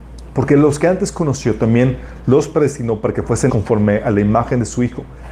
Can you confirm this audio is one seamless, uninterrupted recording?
no; 1 cut; at 3.5 s

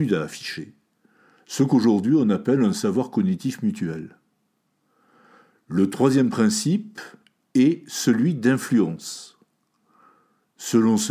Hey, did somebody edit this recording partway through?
no; 0 cuts

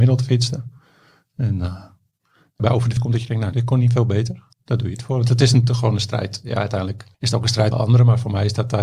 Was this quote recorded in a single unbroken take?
no; 6 cuts; at 2.6 s, 3.0 s, 3.5 s, 4.5 s, 7.1 s, 7.7 s

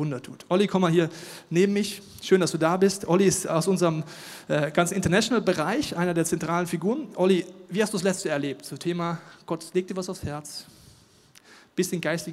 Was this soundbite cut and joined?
no; 0 cuts

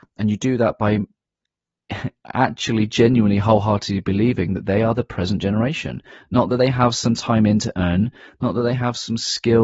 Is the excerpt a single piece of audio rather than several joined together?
yes; 0 cuts

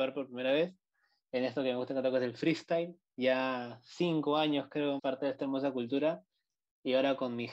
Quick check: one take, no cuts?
no; 1 cut; at 5.0 s

